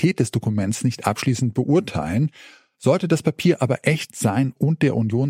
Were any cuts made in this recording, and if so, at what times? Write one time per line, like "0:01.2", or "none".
none